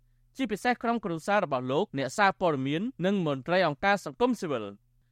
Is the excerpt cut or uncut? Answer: cut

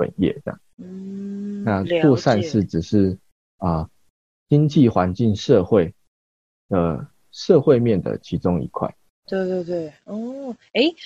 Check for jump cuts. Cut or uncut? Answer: uncut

